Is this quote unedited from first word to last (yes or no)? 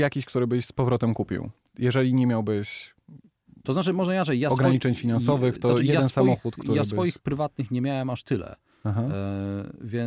yes